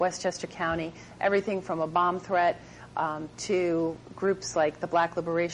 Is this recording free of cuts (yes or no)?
yes